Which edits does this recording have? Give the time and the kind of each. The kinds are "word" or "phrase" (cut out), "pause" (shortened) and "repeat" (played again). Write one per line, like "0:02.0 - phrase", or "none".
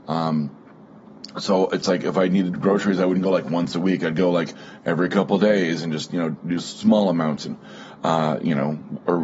none